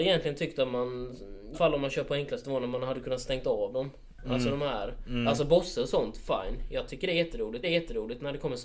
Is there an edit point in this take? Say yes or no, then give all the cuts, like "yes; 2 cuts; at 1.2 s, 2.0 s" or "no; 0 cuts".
yes; 2 cuts; at 1.5 s, 7.6 s